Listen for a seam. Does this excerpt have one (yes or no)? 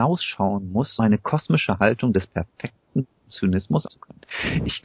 yes